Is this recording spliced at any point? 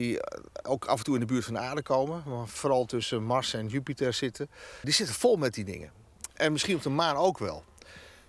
yes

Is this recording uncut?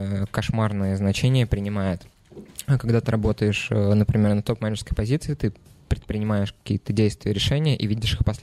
yes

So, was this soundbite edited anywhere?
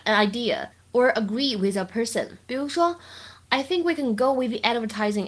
yes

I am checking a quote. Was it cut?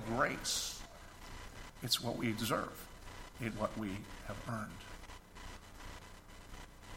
yes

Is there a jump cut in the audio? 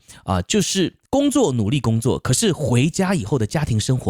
yes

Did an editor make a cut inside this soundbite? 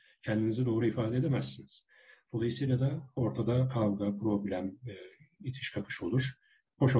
no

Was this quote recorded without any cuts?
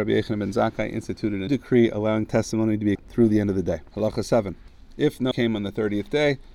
no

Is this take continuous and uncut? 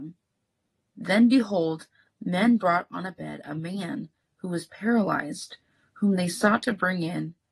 yes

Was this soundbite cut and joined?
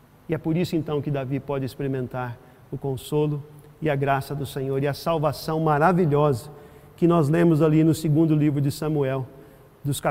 no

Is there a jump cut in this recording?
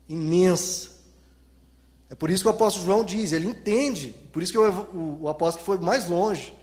no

